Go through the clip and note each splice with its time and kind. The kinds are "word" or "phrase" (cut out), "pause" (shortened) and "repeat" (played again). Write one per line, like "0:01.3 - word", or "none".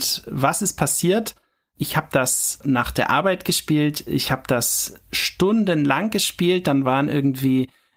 none